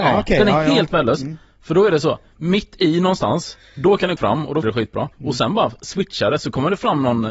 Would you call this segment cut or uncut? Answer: cut